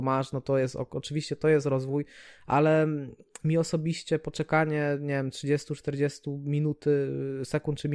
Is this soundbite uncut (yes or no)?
yes